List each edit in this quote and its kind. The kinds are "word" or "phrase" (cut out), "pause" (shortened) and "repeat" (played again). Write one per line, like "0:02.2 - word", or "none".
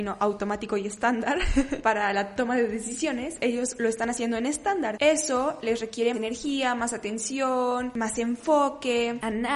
0:06.1 - word